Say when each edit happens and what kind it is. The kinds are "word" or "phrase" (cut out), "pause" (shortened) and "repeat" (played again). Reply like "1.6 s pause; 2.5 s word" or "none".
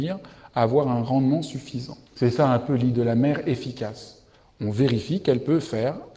2.1 s pause; 2.9 s word